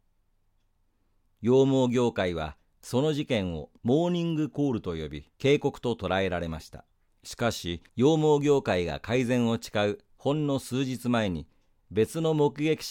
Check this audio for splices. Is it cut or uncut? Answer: cut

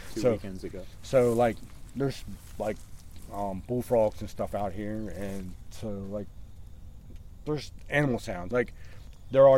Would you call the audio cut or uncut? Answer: uncut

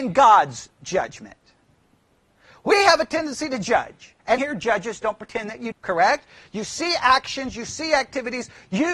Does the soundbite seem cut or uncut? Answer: cut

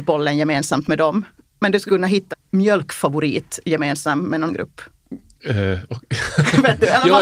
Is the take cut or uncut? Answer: cut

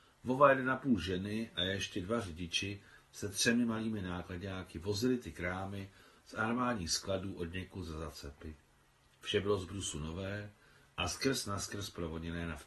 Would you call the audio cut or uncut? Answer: uncut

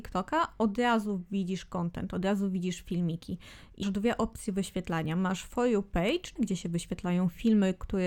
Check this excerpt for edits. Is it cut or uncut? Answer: cut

